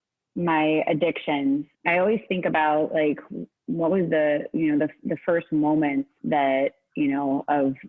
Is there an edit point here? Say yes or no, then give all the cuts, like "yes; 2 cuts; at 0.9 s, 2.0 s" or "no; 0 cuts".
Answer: yes; 1 cut; at 1.7 s